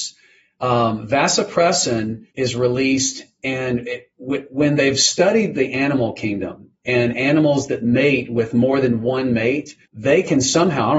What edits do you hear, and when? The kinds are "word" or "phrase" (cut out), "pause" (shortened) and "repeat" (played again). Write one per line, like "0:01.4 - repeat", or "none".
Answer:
0:02.3 - pause
0:09.8 - pause